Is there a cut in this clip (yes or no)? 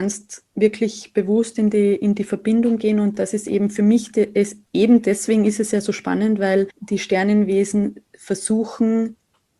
no